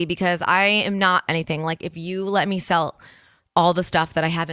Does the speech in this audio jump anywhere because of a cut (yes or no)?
yes